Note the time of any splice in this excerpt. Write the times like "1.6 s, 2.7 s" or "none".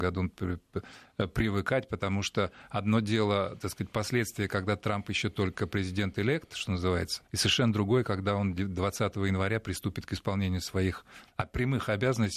7.3 s

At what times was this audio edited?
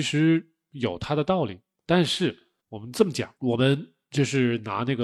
2.6 s, 3.4 s

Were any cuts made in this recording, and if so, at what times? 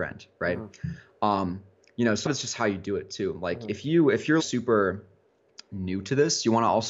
2.3 s, 4.4 s

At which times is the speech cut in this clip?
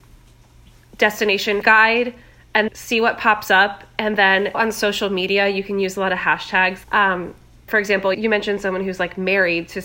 1.6 s, 2.7 s, 4.5 s, 6.8 s, 7.7 s, 8.1 s

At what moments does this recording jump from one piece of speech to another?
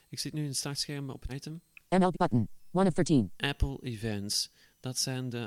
1.3 s, 2.1 s

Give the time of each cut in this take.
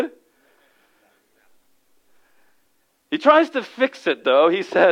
none

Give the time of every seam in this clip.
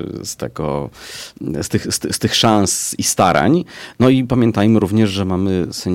none

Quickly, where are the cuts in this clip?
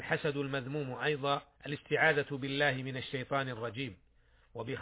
1.6 s

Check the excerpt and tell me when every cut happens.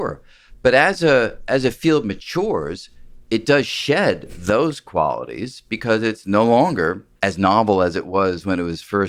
7.2 s

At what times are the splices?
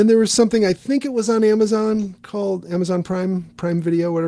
none

